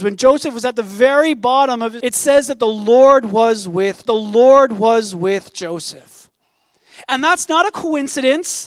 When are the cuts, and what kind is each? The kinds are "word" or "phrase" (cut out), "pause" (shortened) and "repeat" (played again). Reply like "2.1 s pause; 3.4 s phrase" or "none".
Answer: 2.0 s word; 4.1 s repeat